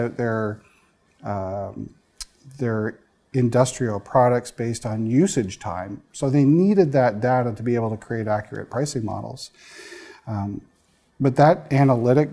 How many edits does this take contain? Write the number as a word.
zero